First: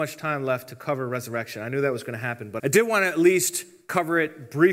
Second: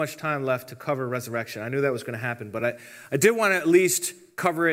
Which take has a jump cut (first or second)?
first